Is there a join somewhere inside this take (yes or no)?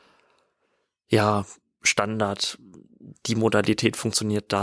no